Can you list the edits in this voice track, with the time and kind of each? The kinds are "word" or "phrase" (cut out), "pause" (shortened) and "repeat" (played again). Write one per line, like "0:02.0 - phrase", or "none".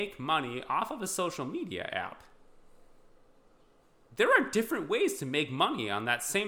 none